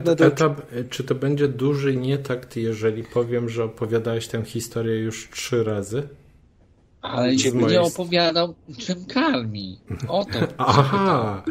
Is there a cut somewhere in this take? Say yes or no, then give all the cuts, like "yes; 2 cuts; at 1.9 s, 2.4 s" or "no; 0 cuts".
no; 0 cuts